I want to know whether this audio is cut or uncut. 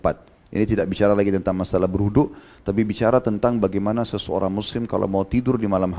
uncut